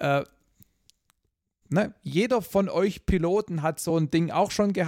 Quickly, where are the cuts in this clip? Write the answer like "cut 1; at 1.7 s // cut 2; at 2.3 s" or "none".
none